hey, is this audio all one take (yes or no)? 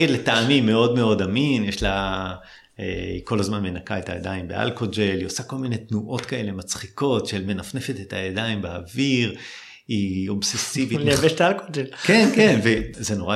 yes